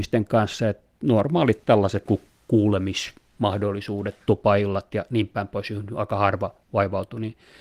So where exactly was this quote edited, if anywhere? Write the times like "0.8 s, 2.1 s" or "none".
2.1 s